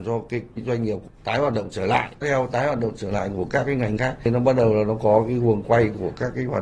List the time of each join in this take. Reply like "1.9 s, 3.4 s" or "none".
2.2 s, 4.0 s